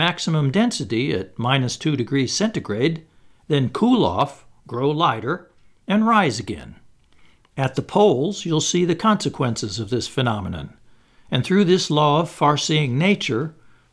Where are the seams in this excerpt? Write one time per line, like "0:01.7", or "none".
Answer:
none